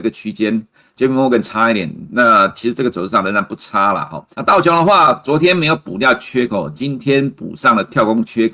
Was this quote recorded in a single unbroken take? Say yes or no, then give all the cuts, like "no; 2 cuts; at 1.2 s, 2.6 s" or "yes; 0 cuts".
no; 1 cut; at 4.3 s